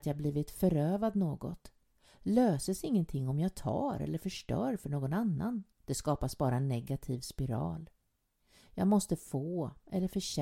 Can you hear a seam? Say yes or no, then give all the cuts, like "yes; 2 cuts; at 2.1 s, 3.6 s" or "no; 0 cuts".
yes; 1 cut; at 5.7 s